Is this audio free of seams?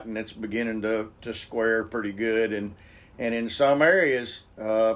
yes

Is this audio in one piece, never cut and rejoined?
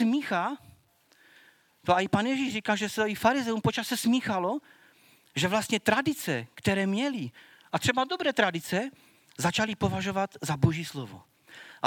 yes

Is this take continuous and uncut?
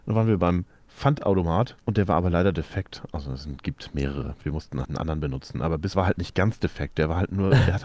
no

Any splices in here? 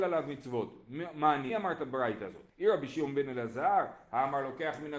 yes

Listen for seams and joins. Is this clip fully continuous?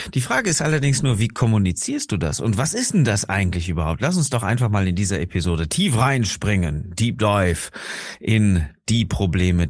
yes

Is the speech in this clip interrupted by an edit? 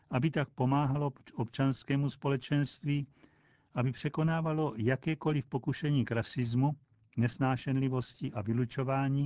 no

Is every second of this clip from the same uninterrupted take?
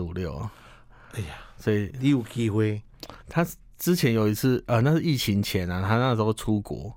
no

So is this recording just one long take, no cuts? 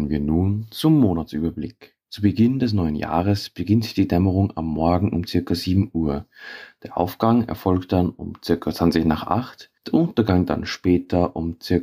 no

